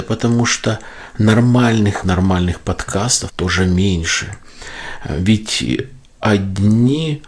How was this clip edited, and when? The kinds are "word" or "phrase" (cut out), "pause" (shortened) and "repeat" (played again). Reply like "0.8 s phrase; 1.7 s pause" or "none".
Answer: 2.0 s word; 3.3 s word